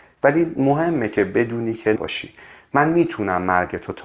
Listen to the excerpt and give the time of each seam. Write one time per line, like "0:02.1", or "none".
0:02.0